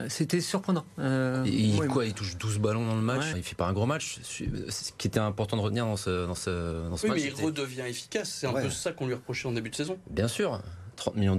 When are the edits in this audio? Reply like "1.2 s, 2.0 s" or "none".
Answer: 3.3 s